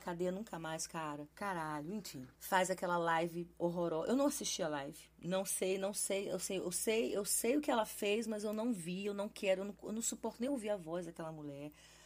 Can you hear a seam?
no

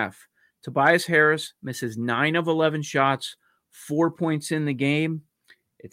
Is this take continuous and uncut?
yes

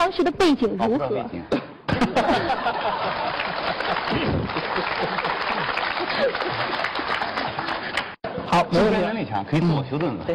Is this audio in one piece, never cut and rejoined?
no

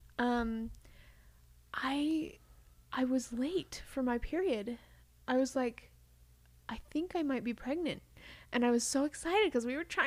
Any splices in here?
no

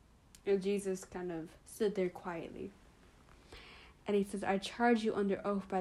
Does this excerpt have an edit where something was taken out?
yes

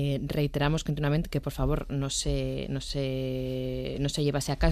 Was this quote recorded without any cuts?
yes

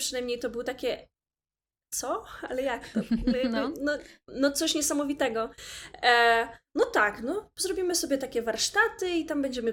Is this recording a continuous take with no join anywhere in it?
yes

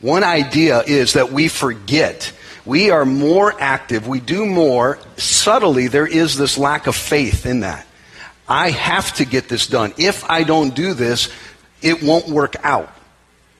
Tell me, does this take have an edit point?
no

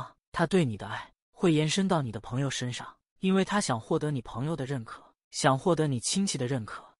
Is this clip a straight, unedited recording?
yes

